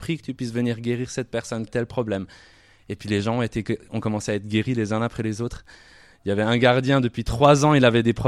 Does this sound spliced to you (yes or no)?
yes